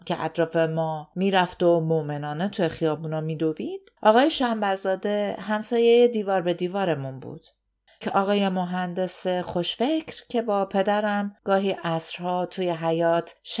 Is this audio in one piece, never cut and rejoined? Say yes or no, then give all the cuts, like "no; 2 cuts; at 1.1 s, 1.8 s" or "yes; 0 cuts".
no; 2 cuts; at 4.0 s, 8.0 s